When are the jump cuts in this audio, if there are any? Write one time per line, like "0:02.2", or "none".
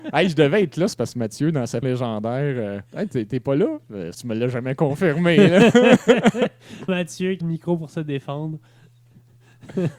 0:00.9
0:01.8
0:02.9
0:04.1
0:06.9
0:07.4